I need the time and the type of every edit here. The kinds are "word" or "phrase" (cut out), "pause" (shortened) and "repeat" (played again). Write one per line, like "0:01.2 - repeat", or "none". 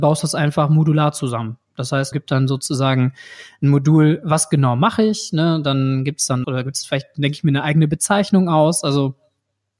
0:02.1 - word
0:06.4 - word